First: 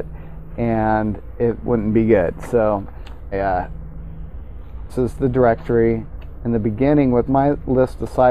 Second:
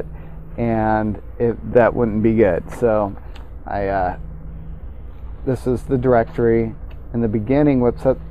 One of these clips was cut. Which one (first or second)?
first